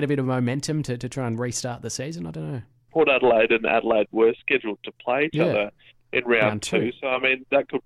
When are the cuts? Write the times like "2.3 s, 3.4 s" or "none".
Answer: none

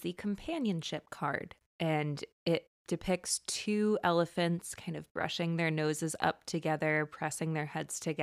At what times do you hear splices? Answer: none

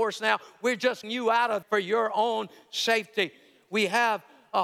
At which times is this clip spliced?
1.0 s, 1.6 s

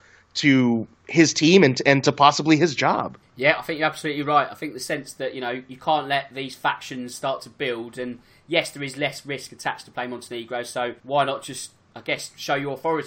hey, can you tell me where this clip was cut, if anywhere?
0.9 s, 3.2 s, 11.0 s

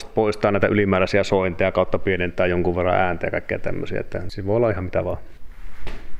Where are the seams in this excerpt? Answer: none

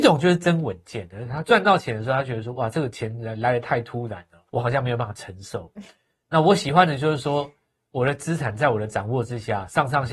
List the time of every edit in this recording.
4.5 s

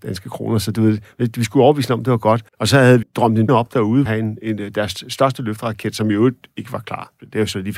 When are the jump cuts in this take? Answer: 2.5 s, 3.0 s, 3.5 s, 4.1 s

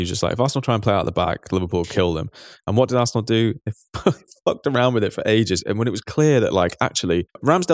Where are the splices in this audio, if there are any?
none

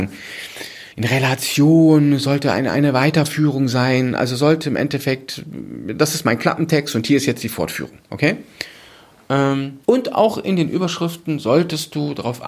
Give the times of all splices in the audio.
0.9 s, 9.8 s

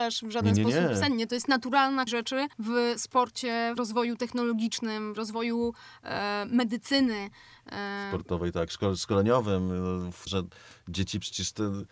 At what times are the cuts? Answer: 2.1 s, 2.5 s, 3.8 s, 5.2 s, 10.3 s

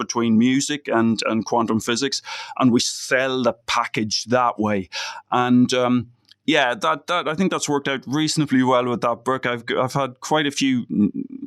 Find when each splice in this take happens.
none

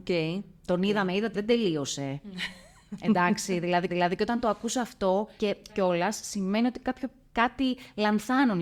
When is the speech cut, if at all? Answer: 1.3 s, 3.9 s, 5.4 s, 5.7 s, 7.2 s

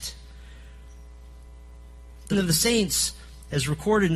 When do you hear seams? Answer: 2.3 s

